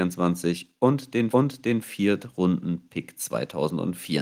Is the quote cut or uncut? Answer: cut